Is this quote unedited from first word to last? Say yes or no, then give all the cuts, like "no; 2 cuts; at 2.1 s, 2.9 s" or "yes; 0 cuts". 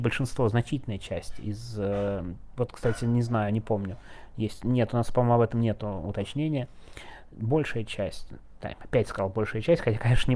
yes; 0 cuts